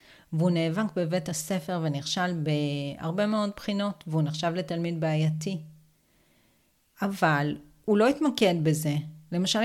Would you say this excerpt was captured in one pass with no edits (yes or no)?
yes